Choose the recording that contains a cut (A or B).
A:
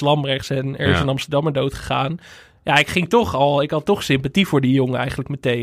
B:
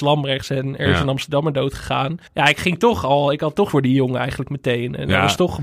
B